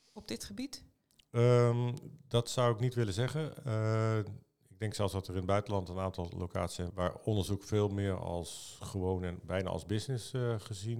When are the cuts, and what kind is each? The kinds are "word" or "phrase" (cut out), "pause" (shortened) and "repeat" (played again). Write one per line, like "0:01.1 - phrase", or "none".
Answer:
0:06.9 - word